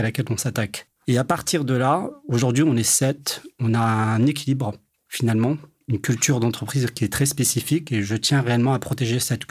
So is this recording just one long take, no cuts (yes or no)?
no